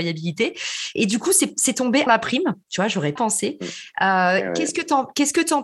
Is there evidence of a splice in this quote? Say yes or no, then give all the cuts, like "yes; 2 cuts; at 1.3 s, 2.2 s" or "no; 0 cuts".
yes; 2 cuts; at 2.1 s, 3.2 s